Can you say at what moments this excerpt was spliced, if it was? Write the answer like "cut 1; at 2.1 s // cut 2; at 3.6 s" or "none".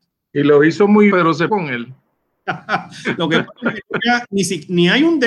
cut 1; at 1.1 s // cut 2; at 1.5 s // cut 3; at 4.0 s